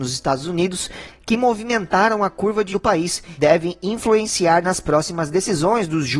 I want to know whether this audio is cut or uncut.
cut